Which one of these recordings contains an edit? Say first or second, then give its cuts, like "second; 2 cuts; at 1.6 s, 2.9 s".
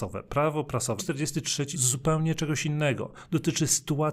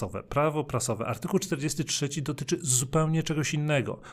first; 2 cuts; at 1.0 s, 1.7 s